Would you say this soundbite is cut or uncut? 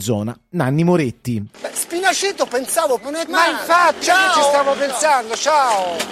cut